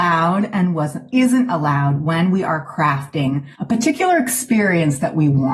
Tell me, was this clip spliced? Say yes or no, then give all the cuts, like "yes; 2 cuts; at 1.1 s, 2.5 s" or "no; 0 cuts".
yes; 2 cuts; at 1.1 s, 3.5 s